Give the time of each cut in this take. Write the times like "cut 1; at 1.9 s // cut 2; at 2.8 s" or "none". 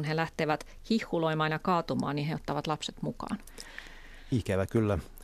none